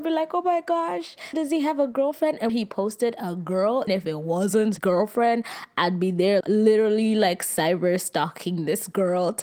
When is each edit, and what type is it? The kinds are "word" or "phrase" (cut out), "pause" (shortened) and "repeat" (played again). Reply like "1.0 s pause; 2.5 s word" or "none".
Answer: 1.3 s word; 2.5 s word; 3.9 s word; 4.8 s word; 6.4 s word